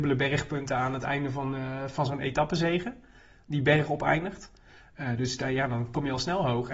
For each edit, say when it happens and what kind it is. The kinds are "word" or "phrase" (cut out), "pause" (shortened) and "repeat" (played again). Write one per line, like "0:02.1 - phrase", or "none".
none